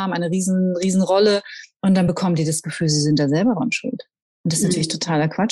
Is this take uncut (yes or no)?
yes